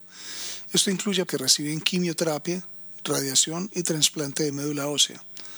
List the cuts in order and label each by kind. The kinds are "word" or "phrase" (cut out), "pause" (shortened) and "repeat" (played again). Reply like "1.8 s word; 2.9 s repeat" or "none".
1.3 s word

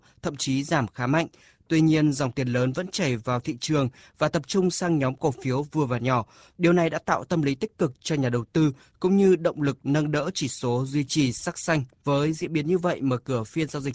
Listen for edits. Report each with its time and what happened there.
none

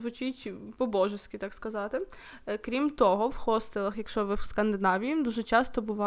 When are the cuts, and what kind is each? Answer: none

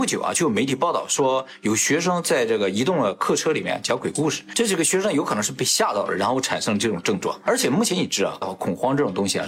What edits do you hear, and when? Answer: 8.4 s phrase

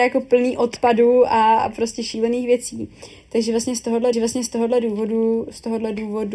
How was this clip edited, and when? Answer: 4.1 s repeat

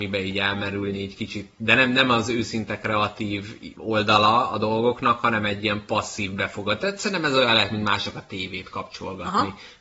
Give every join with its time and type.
none

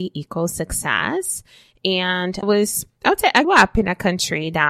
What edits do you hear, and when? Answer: 2.4 s word; 3.4 s word

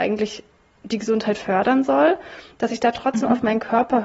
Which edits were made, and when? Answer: none

